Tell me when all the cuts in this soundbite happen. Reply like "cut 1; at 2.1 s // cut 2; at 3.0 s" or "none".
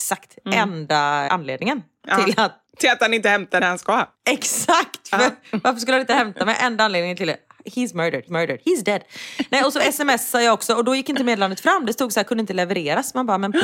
cut 1; at 1.3 s // cut 2; at 3.6 s // cut 3; at 4.1 s // cut 4; at 8.3 s